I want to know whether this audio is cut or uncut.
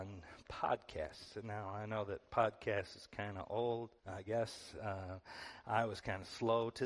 cut